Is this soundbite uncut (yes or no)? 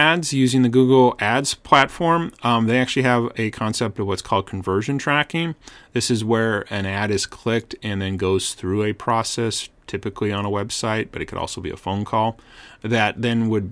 yes